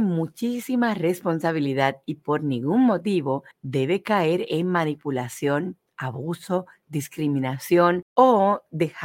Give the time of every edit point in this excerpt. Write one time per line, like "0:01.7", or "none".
0:03.5
0:08.1